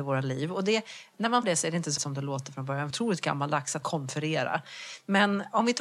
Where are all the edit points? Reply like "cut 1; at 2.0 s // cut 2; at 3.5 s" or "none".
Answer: cut 1; at 1.4 s // cut 2; at 2.0 s // cut 3; at 2.9 s // cut 4; at 3.8 s